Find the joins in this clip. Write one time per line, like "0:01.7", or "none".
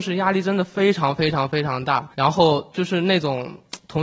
0:02.1